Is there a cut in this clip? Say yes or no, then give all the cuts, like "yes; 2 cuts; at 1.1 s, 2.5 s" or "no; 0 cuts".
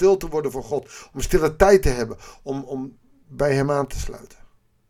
no; 0 cuts